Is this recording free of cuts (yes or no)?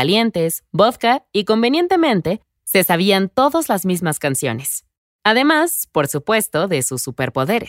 yes